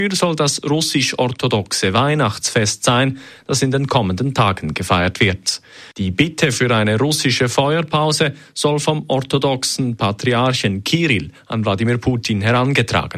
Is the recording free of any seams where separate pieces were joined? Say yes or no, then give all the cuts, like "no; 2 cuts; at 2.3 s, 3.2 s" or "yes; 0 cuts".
no; 1 cut; at 5.9 s